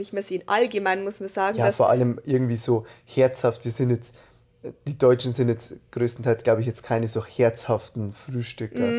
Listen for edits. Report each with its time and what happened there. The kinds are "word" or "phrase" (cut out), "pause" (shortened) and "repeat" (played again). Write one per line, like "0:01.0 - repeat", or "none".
none